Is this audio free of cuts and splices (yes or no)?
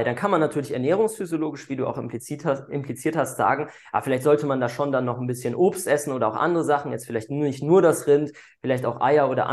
yes